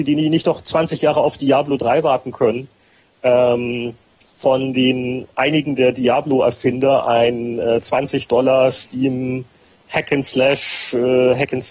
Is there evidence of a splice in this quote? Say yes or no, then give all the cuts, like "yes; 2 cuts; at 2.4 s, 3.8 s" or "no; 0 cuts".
no; 0 cuts